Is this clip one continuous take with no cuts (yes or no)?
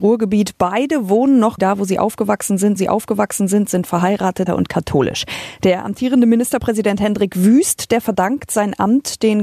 no